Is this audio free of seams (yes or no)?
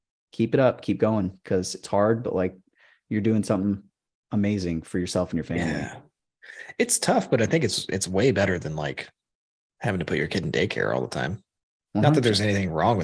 yes